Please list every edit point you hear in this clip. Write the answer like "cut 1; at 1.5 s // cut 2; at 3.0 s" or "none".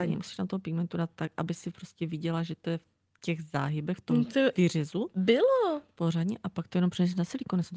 none